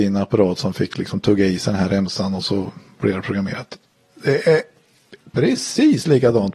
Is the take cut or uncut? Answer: uncut